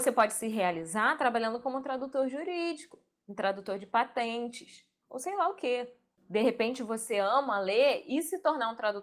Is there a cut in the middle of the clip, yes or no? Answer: no